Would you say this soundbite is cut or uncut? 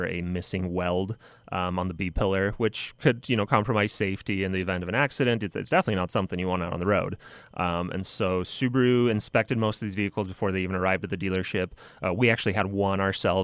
uncut